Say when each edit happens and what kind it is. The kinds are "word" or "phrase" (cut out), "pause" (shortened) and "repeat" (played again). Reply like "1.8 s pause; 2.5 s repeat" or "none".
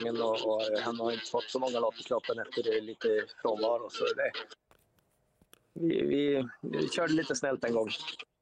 none